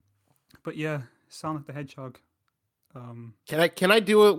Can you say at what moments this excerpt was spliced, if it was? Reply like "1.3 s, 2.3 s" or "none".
none